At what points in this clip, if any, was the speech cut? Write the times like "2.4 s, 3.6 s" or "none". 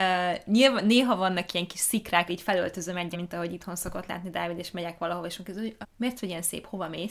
2.3 s, 3.1 s, 5.8 s